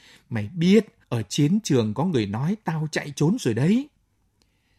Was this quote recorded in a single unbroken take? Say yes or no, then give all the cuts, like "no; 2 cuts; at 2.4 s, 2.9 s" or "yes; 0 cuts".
no; 1 cut; at 1.0 s